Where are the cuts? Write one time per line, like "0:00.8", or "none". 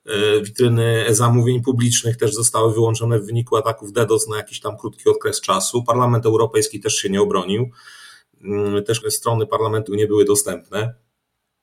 0:09.0
0:09.9